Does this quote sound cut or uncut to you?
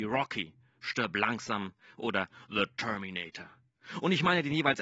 uncut